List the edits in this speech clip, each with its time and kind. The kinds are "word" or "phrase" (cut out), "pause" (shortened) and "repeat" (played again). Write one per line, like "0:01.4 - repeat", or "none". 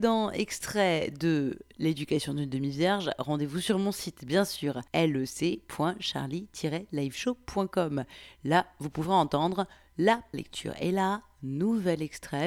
0:04.9 - pause
0:10.3 - word